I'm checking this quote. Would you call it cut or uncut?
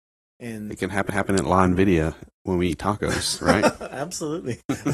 cut